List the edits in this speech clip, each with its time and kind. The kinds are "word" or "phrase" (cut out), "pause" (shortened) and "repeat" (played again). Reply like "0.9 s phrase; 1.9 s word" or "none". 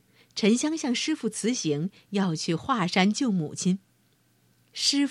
none